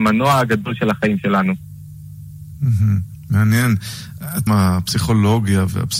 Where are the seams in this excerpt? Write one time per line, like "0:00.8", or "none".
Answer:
0:04.5